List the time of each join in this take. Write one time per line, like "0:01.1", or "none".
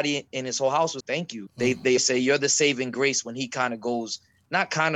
0:01.0
0:01.5
0:02.0